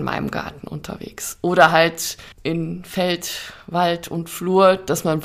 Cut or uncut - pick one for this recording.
cut